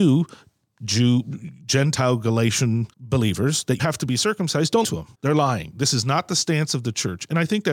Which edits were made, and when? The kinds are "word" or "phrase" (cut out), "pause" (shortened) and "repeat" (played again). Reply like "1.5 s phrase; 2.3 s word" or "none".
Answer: 2.9 s pause; 3.8 s word; 4.8 s word; 5.1 s pause